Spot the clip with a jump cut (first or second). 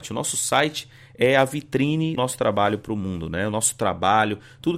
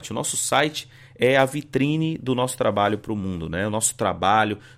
first